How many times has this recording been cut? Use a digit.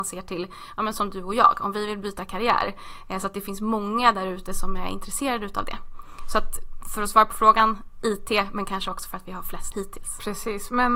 1